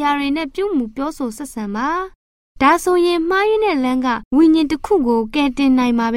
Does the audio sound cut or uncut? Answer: cut